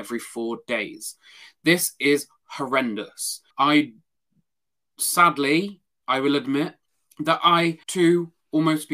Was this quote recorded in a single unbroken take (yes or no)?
no